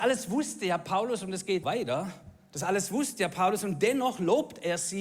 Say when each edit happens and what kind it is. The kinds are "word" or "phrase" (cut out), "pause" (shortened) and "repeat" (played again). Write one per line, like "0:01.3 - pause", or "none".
0:01.6 - word